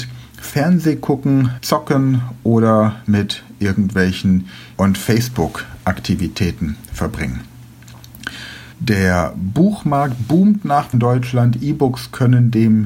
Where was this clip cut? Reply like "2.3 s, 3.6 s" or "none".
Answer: 1.6 s, 4.7 s, 8.7 s, 10.9 s

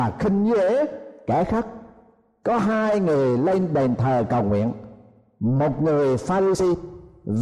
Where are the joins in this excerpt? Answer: none

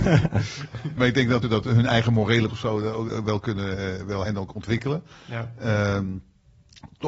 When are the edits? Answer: 1.0 s, 1.4 s, 2.5 s, 3.1 s, 4.3 s

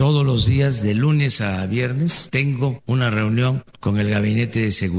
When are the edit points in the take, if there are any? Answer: none

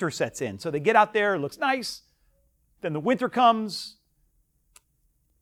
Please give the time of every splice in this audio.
none

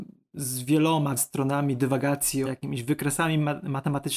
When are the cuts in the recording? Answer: 1.2 s, 2.5 s

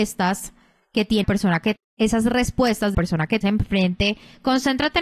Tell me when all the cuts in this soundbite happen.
1.2 s, 1.8 s, 2.9 s, 3.4 s

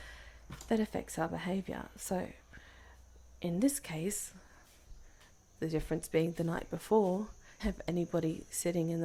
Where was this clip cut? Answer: 7.6 s

